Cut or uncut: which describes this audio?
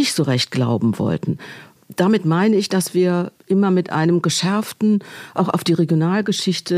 uncut